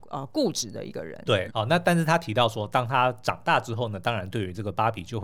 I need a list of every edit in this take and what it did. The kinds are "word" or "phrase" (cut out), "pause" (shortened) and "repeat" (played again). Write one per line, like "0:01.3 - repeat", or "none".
0:01.5 - word